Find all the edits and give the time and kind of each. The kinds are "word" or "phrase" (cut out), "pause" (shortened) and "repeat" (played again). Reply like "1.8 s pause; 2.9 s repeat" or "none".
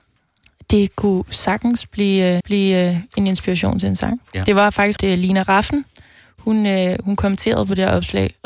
2.4 s repeat; 5.0 s phrase

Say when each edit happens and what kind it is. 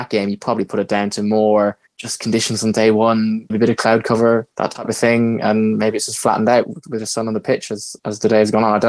1.9 s pause; 3.5 s word; 4.5 s pause

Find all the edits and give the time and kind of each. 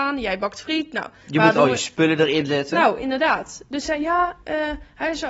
3.8 s word

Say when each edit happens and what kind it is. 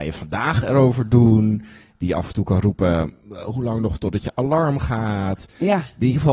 none

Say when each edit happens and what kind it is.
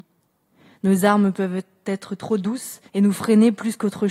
2.9 s pause

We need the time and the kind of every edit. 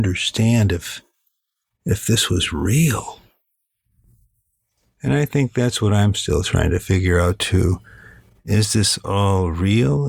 none

